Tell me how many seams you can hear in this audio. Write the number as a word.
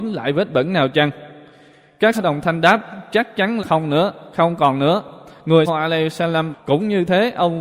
four